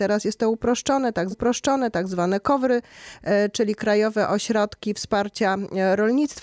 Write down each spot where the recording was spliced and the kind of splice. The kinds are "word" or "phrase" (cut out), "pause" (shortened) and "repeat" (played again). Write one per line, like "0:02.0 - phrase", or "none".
0:01.3 - repeat